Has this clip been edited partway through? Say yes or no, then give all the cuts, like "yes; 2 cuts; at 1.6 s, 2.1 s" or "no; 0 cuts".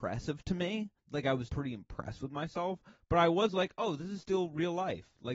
yes; 2 cuts; at 1.0 s, 1.5 s